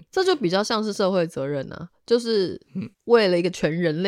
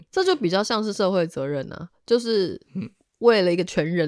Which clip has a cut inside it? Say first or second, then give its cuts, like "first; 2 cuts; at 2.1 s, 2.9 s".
first; 1 cut; at 2.9 s